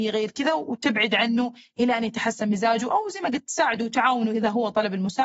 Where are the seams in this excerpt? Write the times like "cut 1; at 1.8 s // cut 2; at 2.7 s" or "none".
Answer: none